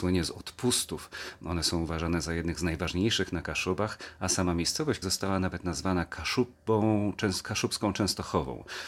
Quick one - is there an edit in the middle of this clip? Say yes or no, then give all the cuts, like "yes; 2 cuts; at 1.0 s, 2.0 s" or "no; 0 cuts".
yes; 1 cut; at 5.0 s